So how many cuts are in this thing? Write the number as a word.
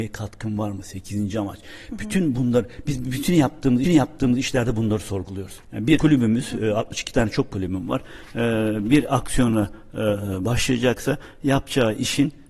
four